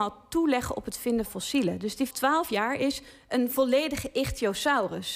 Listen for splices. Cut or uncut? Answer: cut